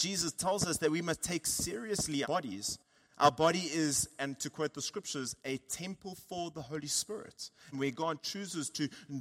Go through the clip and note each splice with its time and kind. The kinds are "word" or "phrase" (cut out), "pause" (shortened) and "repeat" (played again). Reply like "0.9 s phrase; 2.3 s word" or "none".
2.2 s word; 7.7 s phrase